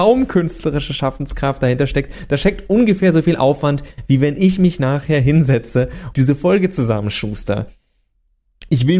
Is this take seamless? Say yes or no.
no